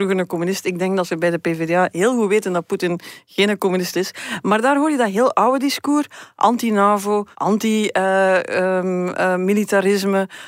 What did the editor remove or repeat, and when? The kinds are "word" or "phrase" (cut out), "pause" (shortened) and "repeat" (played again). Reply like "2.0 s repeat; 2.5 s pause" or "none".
3.9 s phrase; 7.3 s pause